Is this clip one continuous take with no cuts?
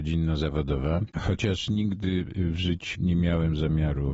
no; 2 cuts; at 1.1 s, 2.9 s

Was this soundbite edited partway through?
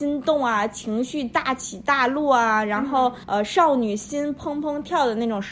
yes; 1 cut; at 3.2 s

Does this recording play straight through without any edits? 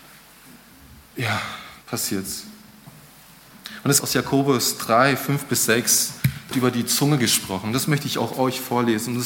no; 3 cuts; at 1.8 s, 4.0 s, 6.5 s

